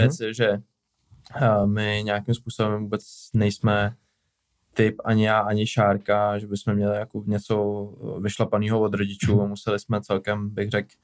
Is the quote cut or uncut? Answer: uncut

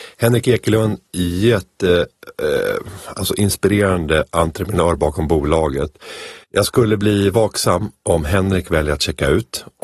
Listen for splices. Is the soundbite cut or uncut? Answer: cut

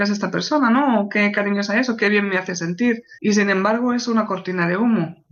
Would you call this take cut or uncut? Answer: cut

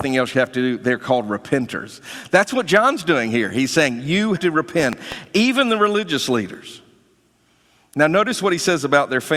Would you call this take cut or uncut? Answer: cut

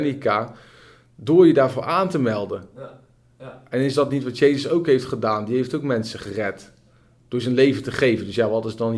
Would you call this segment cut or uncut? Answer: uncut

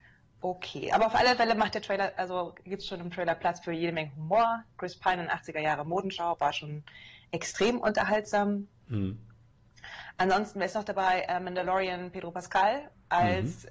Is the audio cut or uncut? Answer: uncut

